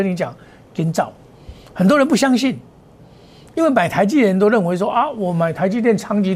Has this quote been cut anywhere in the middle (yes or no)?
no